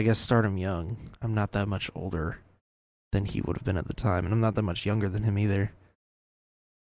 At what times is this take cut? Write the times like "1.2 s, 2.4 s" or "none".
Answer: none